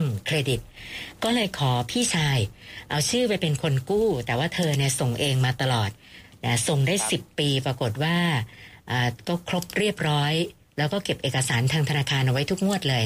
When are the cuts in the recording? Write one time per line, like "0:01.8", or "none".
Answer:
none